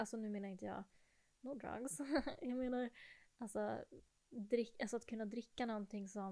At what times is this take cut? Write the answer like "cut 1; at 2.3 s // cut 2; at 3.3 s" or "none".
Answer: none